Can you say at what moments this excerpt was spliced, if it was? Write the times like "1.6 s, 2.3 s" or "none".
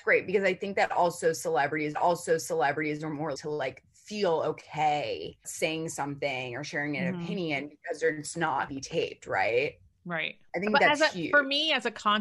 1.9 s, 3.3 s, 5.4 s, 8.7 s